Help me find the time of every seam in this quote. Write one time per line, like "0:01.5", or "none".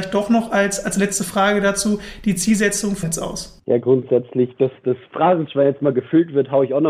0:03.0